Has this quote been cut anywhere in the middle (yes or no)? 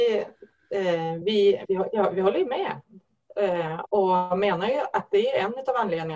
no